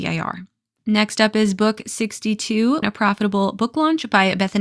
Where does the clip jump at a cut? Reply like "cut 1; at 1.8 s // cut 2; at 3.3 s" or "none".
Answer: cut 1; at 2.8 s